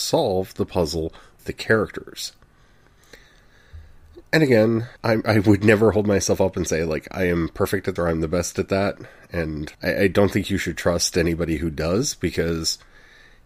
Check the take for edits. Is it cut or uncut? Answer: cut